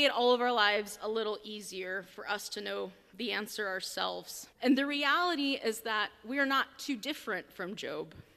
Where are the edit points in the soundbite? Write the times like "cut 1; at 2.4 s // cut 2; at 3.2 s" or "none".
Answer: cut 1; at 4.5 s